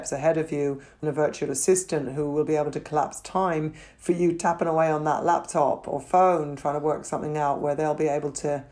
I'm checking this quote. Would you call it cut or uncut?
cut